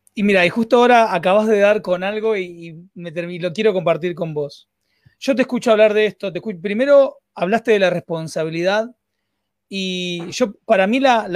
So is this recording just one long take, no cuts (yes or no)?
yes